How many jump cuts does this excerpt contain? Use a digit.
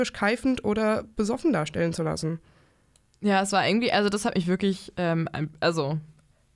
1